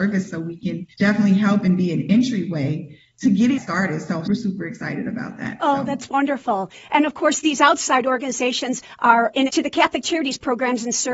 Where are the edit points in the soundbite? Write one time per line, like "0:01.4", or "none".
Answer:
0:00.9
0:03.6
0:04.3
0:09.5